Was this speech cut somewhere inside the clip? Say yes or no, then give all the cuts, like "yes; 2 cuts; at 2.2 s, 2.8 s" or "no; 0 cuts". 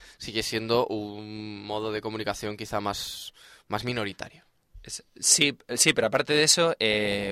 no; 0 cuts